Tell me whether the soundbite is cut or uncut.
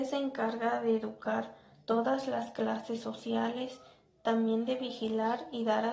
uncut